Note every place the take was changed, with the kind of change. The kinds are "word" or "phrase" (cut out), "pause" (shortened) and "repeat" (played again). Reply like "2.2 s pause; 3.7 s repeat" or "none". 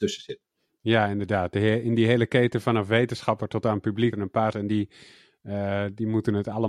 4.1 s word; 4.5 s word